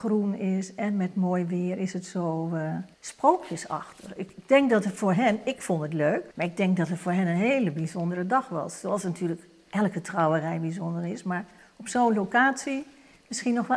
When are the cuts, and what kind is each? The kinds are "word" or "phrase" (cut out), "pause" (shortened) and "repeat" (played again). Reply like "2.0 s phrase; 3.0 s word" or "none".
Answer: 2.9 s pause; 6.3 s pause